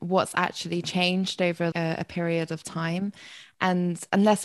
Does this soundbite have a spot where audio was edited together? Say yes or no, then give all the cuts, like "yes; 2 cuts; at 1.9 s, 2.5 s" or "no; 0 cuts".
yes; 1 cut; at 1.7 s